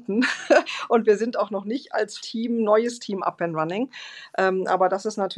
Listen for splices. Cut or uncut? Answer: cut